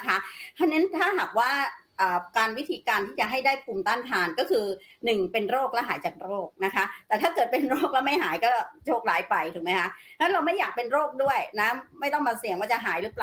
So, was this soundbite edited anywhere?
no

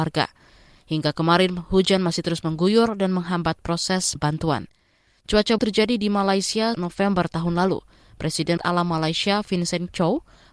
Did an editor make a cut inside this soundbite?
yes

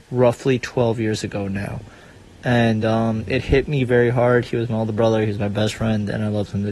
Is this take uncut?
yes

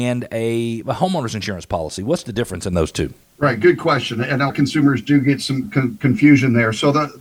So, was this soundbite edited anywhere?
yes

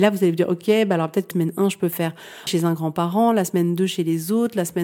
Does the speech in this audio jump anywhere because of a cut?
yes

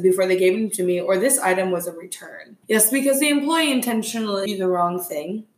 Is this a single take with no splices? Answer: no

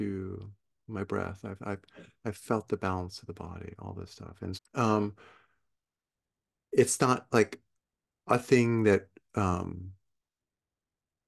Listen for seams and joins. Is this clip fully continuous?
no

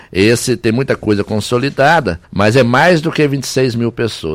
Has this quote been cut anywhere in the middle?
yes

